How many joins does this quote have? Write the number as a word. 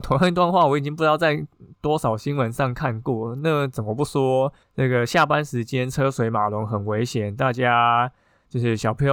zero